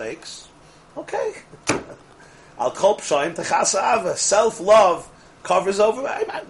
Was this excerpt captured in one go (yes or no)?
yes